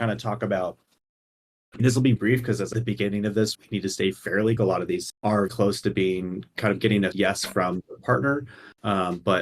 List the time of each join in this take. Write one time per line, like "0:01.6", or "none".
0:01.8
0:02.2
0:02.7
0:03.5
0:04.6
0:05.1
0:05.5
0:07.1